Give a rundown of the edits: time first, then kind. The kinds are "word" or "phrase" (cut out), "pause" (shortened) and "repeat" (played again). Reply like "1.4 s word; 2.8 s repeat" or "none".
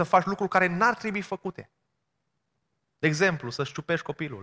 none